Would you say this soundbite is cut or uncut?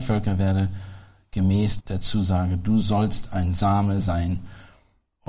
cut